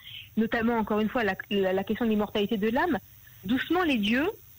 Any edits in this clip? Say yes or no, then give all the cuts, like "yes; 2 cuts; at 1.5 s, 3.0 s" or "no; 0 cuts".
no; 0 cuts